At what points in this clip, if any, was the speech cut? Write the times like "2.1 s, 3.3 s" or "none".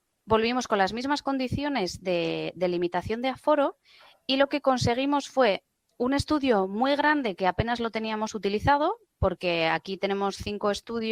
none